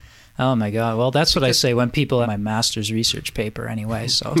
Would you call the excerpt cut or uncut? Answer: cut